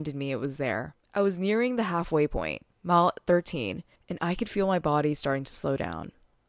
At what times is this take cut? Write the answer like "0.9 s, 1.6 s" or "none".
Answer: 1.0 s, 4.0 s